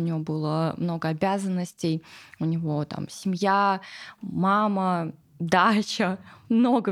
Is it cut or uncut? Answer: cut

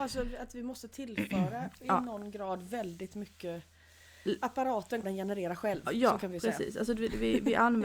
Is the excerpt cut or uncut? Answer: cut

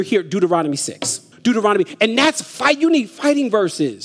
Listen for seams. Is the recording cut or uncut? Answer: cut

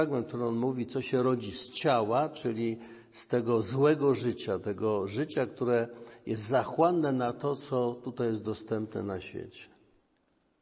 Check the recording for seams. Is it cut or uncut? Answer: uncut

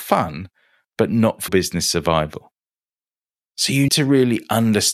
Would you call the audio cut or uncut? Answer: cut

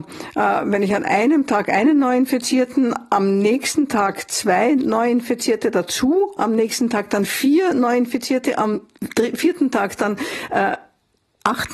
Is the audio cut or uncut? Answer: uncut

